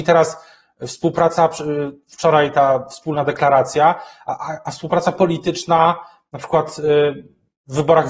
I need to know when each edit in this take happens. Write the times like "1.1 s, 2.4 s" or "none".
none